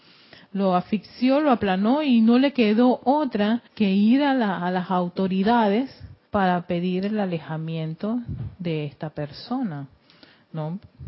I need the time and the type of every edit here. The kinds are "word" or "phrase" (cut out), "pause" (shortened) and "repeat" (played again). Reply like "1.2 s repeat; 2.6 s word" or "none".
3.7 s pause; 6.3 s pause